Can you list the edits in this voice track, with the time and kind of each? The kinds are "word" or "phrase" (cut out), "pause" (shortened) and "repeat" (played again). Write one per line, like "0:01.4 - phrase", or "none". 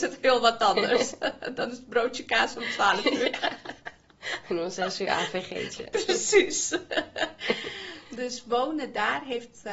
none